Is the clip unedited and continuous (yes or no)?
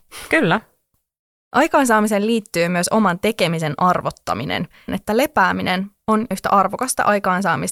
no